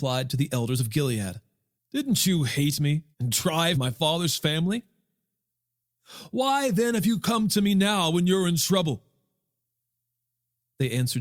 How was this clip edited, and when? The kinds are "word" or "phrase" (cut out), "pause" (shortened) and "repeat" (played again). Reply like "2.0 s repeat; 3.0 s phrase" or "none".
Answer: 1.8 s pause; 3.1 s pause; 3.7 s phrase